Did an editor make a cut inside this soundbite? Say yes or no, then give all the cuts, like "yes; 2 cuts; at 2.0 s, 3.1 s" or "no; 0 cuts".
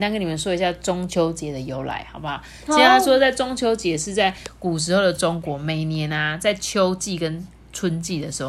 no; 0 cuts